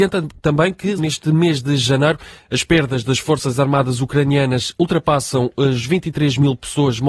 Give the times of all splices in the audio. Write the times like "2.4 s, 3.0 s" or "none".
1.0 s